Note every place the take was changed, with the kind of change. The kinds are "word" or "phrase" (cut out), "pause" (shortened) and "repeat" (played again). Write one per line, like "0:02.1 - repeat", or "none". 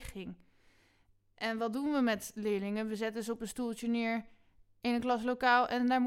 none